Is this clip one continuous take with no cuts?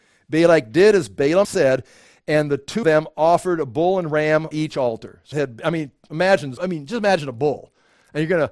no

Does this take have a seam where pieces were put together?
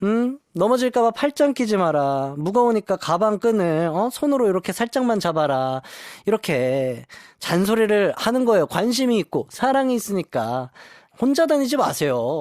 no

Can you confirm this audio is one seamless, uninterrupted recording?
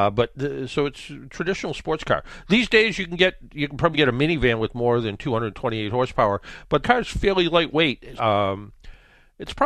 no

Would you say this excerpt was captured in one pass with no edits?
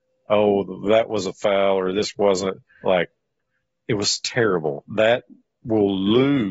no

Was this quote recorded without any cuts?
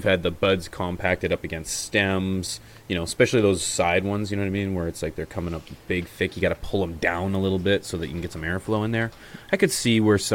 yes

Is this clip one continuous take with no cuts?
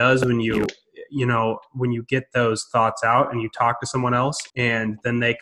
no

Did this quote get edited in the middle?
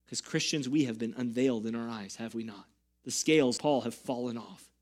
yes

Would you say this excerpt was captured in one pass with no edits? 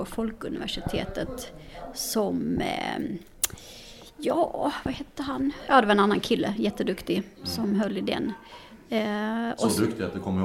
yes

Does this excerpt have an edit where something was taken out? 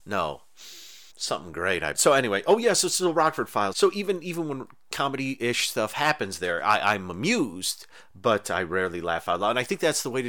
yes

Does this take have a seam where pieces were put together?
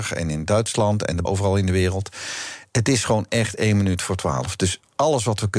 yes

